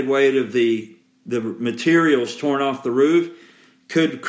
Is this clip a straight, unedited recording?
yes; 0 cuts

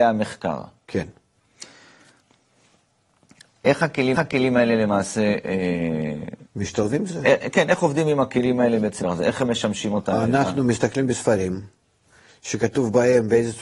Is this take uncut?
no; 4 cuts; at 4.1 s, 6.5 s, 7.1 s, 9.0 s

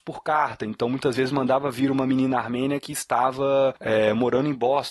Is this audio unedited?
yes; 0 cuts

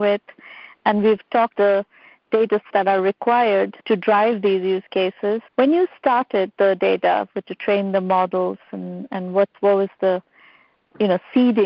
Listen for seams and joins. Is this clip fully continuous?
no; 6 cuts; at 1.5 s, 2.7 s, 3.8 s, 5.5 s, 6.5 s, 7.4 s

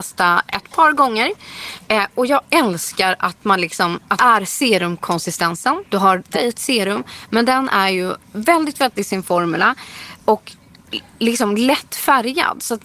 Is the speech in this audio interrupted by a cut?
yes; 4 cuts; at 4.2 s, 5.9 s, 6.3 s, 9.0 s

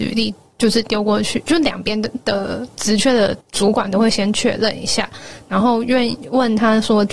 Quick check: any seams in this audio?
yes; 1 cut; at 3.4 s

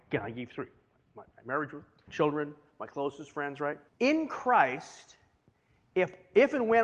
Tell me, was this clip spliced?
yes; 3 cuts; at 1.3 s, 2.1 s, 3.9 s

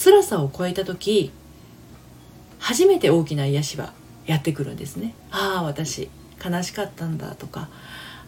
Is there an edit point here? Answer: yes; 1 cut; at 5.2 s

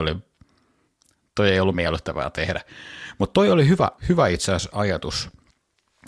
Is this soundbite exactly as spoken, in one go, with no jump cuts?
no; 1 cut; at 4.0 s

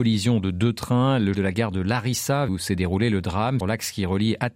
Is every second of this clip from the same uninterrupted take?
no; 3 cuts; at 1.3 s, 2.5 s, 3.6 s

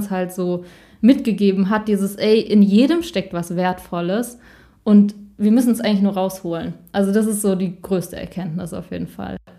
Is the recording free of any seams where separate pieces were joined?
yes; 0 cuts

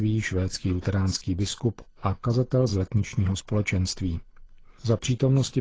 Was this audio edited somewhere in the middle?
no; 0 cuts

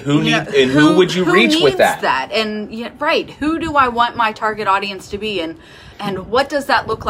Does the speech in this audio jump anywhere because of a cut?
yes; 1 cut; at 5.9 s

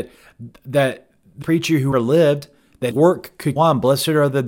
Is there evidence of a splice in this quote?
yes; 4 cuts; at 1.4 s, 1.9 s, 2.9 s, 3.6 s

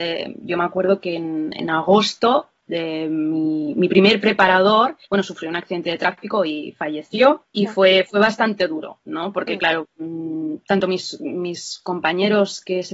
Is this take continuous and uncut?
no; 2 cuts; at 5.0 s, 7.5 s

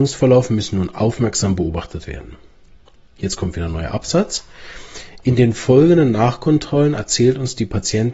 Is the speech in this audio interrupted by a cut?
no; 0 cuts

